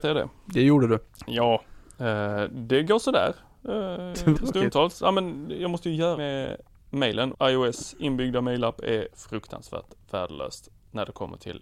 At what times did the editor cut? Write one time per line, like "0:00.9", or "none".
0:04.4
0:06.2
0:07.3
0:09.1